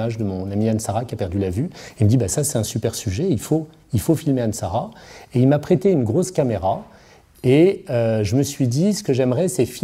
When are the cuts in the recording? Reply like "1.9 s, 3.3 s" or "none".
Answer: none